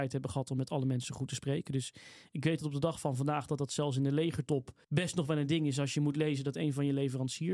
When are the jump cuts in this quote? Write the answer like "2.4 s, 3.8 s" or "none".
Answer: 4.8 s

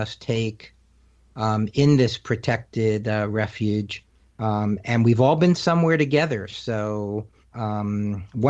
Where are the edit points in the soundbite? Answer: 4.2 s, 7.4 s

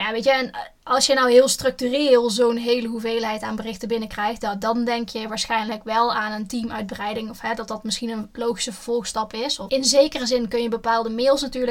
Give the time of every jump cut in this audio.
none

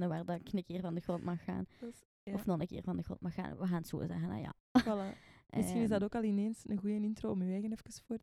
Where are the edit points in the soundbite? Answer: none

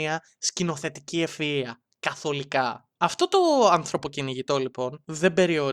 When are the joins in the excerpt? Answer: 3.0 s

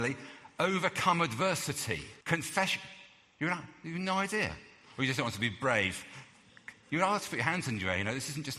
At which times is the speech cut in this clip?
2.2 s

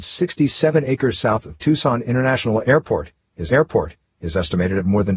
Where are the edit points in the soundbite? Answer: 3.5 s

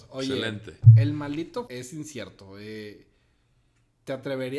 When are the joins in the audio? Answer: 1.7 s

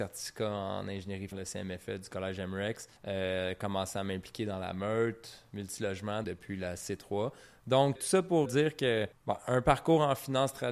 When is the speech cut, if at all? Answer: 1.3 s, 3.0 s, 6.2 s, 7.9 s, 8.4 s, 9.1 s

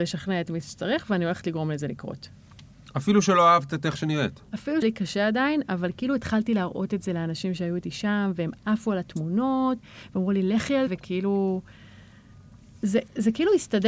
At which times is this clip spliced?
4.8 s, 10.9 s

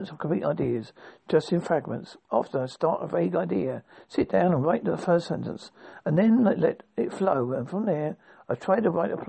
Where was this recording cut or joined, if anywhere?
none

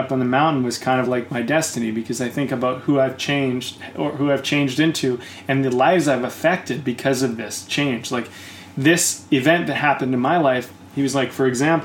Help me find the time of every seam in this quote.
none

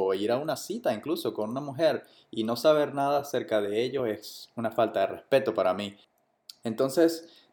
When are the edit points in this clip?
none

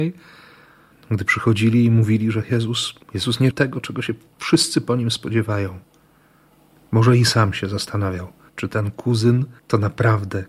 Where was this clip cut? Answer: 3.0 s, 3.5 s, 8.5 s, 9.6 s

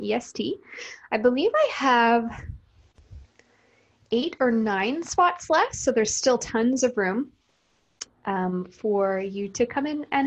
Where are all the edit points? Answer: none

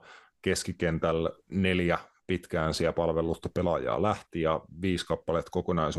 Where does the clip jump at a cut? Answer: 1.4 s

